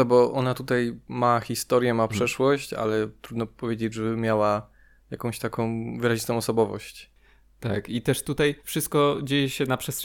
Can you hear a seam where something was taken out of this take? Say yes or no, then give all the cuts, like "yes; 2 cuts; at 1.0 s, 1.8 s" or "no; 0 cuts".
yes; 1 cut; at 8.6 s